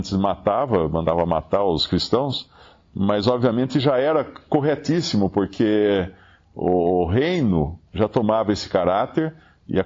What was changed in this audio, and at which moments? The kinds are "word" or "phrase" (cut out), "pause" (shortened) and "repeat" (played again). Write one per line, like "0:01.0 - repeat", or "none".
0:07.9 - pause